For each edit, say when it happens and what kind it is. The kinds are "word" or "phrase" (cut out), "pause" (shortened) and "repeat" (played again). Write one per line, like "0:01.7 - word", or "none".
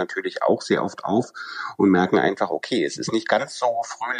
none